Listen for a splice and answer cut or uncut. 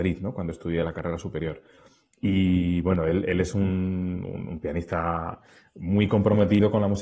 uncut